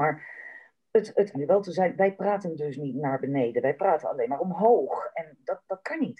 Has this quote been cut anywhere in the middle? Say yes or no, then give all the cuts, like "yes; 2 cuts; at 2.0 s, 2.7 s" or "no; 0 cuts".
yes; 1 cut; at 1.3 s